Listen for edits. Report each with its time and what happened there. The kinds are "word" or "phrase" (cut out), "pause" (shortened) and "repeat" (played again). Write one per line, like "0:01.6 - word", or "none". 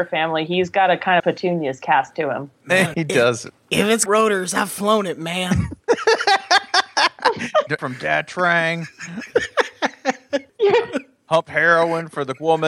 0:01.2 - phrase
0:02.9 - word
0:04.1 - word
0:07.8 - word
0:10.5 - pause